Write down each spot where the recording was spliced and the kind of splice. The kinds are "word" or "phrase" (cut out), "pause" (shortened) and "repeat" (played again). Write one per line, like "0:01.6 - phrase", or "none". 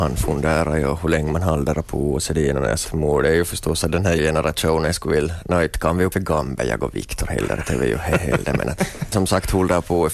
0:02.8 - word
0:04.2 - word
0:06.1 - word
0:09.1 - word